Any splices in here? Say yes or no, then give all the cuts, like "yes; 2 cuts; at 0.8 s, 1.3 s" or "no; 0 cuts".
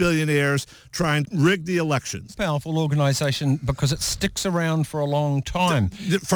yes; 2 cuts; at 1.2 s, 2.3 s